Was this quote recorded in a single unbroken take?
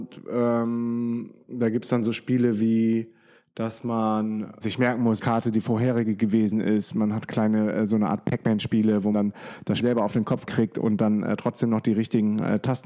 no; 5 cuts; at 4.6 s, 5.2 s, 9.1 s, 9.8 s, 10.5 s

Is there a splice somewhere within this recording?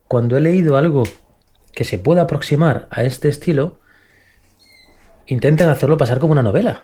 no; 0 cuts

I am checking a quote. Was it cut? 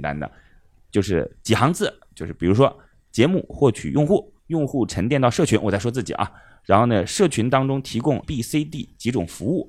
yes; 2 cuts; at 4.4 s, 8.2 s

